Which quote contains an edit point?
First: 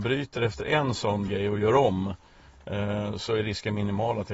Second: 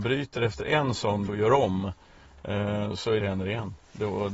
second; 2 cuts; at 1.3 s, 3.2 s

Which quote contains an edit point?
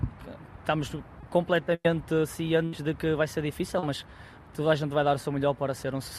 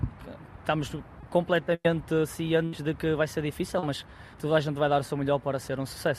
second; 1 cut; at 4.3 s

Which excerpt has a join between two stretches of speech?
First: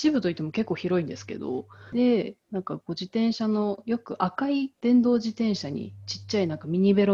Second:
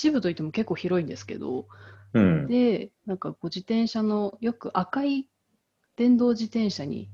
first; 2 cuts; at 1.9 s, 4.7 s

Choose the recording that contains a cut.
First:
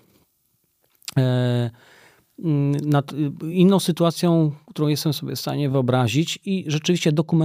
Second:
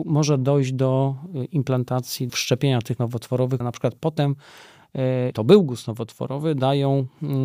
second; 4 cuts; at 2.3 s, 3.0 s, 3.6 s, 5.3 s

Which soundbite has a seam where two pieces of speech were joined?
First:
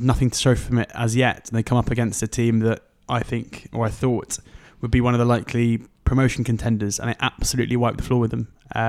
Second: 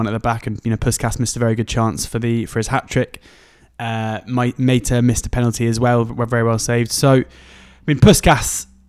first; 1 cut; at 3.7 s

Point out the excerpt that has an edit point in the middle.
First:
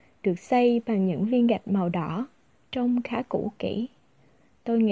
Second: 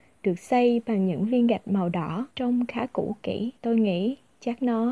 second; 2 cuts; at 2.3 s, 3.6 s

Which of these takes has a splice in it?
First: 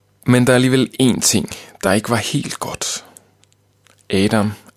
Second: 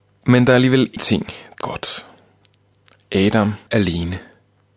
second; 3 cuts; at 1.0 s, 1.6 s, 3.7 s

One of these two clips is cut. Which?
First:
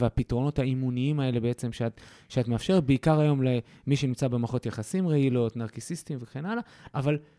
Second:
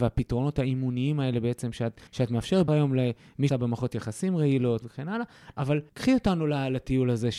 second; 5 cuts; at 2.1 s, 2.7 s, 3.5 s, 4.8 s, 5.9 s

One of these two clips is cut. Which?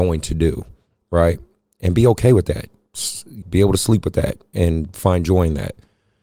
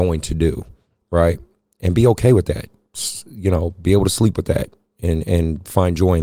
first; 2 cuts; at 3.4 s, 4.5 s

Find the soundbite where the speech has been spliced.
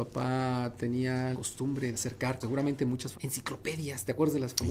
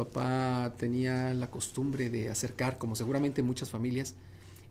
first; 4 cuts; at 1.3 s, 1.9 s, 2.4 s, 3.1 s

